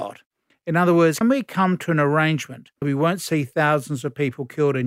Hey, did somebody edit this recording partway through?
yes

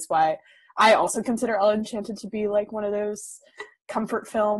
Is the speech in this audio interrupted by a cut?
no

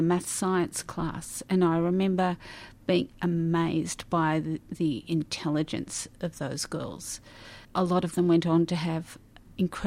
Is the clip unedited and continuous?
no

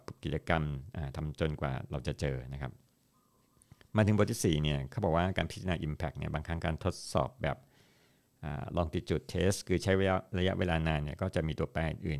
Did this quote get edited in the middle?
no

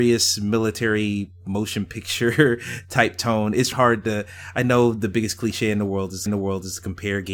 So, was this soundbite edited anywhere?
yes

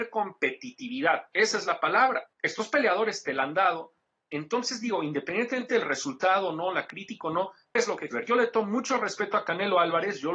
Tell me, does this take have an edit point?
yes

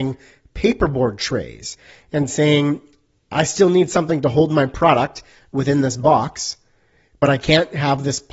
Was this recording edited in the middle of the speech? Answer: no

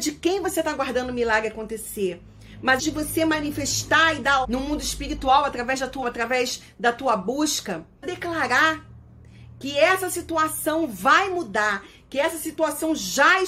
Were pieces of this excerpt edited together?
yes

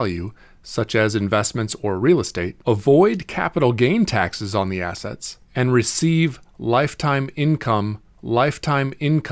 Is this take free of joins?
no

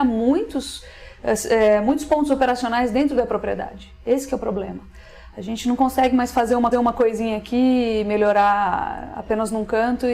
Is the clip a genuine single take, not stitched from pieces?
no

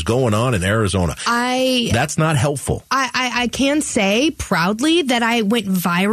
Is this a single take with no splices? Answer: yes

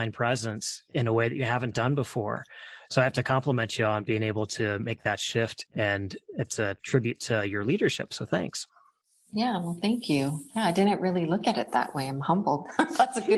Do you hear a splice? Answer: no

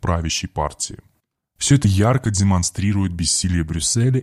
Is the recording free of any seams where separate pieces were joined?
yes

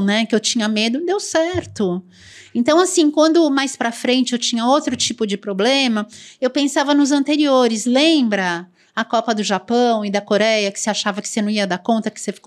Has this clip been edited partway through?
no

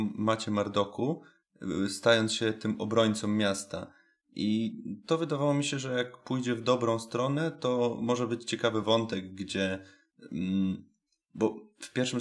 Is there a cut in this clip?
no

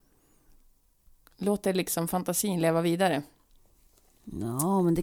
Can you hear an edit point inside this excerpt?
no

